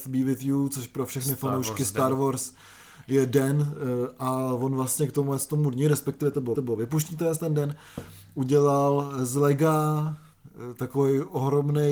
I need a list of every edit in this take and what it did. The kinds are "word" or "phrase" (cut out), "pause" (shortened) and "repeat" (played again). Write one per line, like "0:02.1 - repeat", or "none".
0:06.5 - repeat